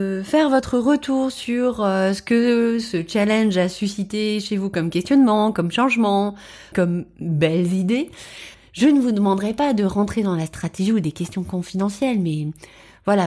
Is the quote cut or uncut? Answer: uncut